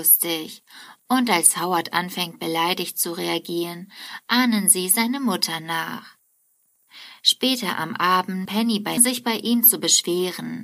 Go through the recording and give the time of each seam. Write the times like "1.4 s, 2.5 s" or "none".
8.5 s, 9.0 s